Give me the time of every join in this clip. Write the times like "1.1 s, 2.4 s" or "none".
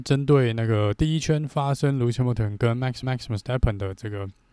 3.0 s